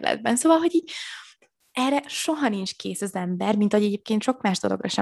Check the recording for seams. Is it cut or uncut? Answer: uncut